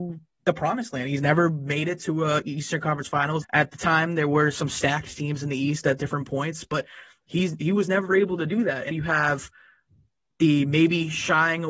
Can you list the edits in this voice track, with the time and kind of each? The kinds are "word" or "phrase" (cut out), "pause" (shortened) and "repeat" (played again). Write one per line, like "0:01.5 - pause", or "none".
0:03.4 - word
0:08.9 - word